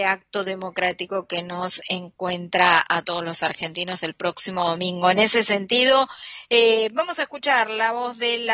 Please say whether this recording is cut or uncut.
uncut